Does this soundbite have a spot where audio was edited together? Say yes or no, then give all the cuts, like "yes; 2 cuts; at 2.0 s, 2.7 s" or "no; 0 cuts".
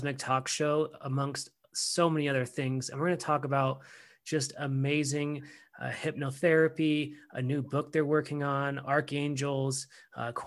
no; 0 cuts